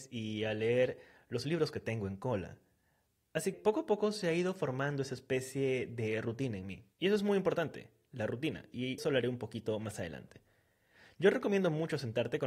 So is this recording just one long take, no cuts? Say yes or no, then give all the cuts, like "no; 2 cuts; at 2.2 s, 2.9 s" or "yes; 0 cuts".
no; 3 cuts; at 3.5 s, 6.9 s, 9.0 s